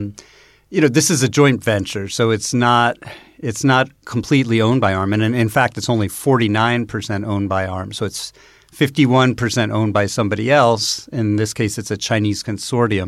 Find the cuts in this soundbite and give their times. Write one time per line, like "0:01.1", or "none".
none